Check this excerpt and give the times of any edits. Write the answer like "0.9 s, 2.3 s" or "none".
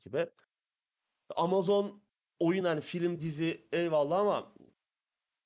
2.6 s, 3.2 s